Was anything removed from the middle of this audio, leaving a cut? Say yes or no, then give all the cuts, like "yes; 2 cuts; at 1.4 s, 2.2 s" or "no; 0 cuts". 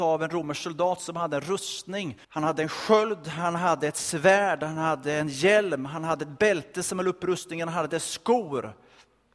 yes; 1 cut; at 2.2 s